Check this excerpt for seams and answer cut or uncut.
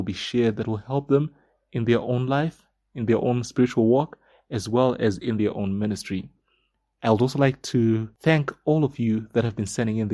uncut